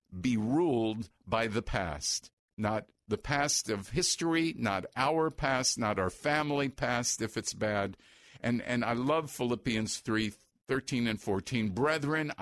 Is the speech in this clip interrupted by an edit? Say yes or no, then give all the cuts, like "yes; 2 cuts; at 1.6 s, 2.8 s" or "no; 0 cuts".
no; 0 cuts